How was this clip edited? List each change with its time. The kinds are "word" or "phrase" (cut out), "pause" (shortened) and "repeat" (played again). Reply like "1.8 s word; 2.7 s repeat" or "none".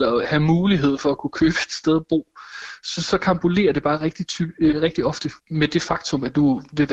5.4 s word